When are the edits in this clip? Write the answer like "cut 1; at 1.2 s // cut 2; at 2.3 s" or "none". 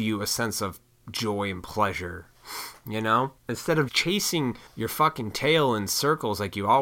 cut 1; at 3.4 s // cut 2; at 3.9 s // cut 3; at 4.7 s